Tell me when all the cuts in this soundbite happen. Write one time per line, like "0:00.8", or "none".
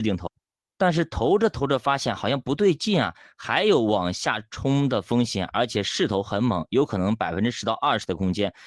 none